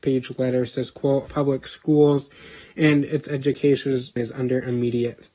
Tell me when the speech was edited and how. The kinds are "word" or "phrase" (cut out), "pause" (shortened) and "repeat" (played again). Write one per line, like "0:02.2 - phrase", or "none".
0:01.2 - word